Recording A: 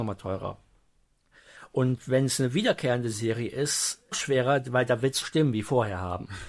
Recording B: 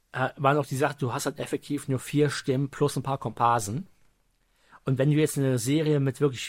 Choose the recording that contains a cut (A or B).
A